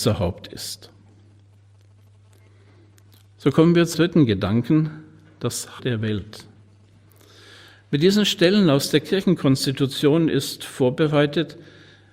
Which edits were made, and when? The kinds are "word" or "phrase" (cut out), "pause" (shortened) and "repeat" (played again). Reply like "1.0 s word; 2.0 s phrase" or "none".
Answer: 3.9 s word; 5.8 s word